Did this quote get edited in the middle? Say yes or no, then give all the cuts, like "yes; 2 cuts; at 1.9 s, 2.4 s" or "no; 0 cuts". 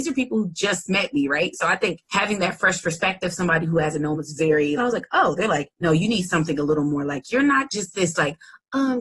yes; 4 cuts; at 2.0 s, 4.1 s, 4.8 s, 5.7 s